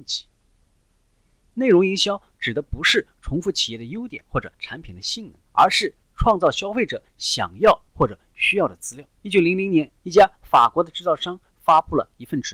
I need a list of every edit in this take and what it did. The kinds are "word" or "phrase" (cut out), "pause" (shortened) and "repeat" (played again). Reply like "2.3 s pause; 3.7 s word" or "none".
4.5 s pause; 5.5 s pause; 9.2 s pause; 10.0 s pause